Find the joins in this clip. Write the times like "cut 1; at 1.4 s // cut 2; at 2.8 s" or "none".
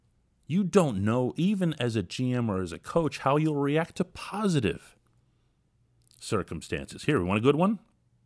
none